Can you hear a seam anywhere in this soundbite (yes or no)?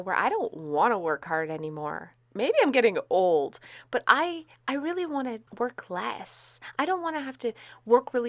yes